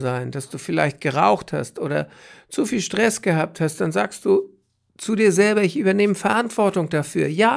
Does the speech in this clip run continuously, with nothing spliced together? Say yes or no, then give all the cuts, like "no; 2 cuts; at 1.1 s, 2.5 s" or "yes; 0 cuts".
yes; 0 cuts